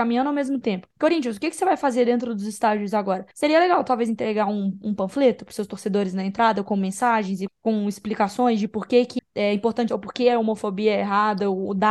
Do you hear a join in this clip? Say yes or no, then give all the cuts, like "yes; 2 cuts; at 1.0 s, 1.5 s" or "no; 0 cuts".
yes; 5 cuts; at 0.9 s, 3.3 s, 7.5 s, 9.2 s, 9.9 s